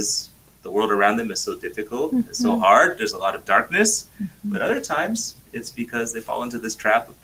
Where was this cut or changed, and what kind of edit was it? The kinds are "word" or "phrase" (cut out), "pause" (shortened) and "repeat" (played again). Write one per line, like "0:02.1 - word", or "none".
none